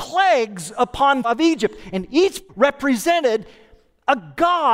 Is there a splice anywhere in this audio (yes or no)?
yes